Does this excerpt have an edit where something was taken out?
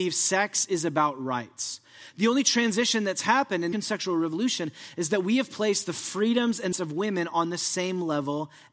yes; 2 cuts; at 3.7 s, 6.7 s

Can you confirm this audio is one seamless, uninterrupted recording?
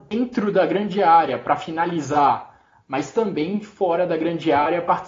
yes; 0 cuts

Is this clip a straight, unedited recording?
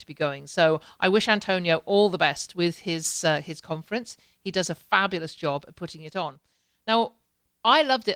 yes; 0 cuts

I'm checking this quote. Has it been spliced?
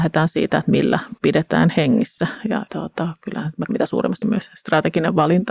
yes; 4 cuts; at 1.2 s, 2.7 s, 3.7 s, 4.2 s

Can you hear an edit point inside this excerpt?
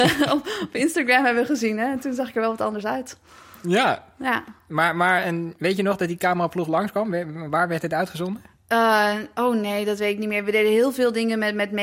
no; 0 cuts

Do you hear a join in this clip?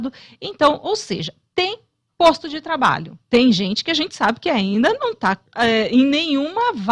yes; 2 cuts; at 3.2 s, 5.5 s

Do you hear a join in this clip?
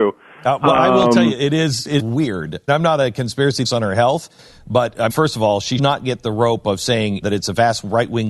yes; 6 cuts; at 2.0 s, 2.7 s, 3.6 s, 5.1 s, 5.8 s, 7.2 s

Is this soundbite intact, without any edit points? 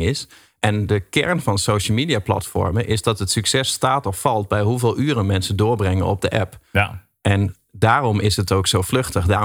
yes; 0 cuts

